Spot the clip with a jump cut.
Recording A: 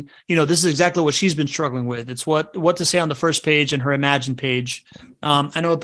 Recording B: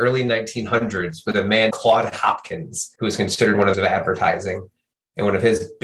B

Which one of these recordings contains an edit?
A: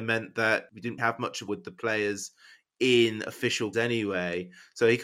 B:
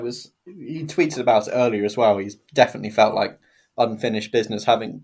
A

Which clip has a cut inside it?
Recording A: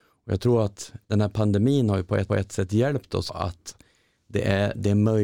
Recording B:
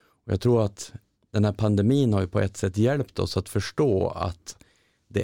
A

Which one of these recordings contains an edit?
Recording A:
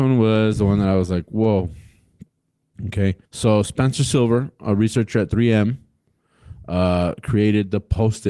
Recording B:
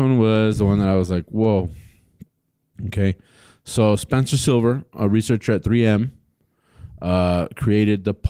A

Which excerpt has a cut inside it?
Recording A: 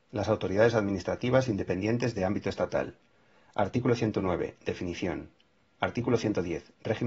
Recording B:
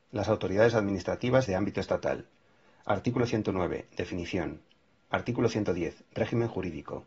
B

